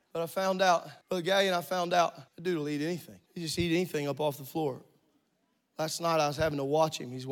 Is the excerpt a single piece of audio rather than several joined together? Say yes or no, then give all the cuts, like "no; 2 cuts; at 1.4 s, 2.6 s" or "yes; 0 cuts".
no; 3 cuts; at 1.0 s, 2.3 s, 3.3 s